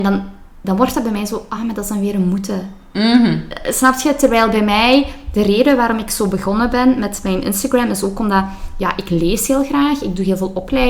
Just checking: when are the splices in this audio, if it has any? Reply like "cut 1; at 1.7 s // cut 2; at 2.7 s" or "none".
none